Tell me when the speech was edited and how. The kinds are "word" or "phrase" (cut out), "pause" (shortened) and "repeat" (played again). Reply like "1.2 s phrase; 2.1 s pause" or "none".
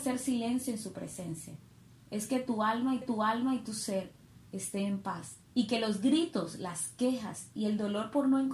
3.0 s repeat; 5.5 s pause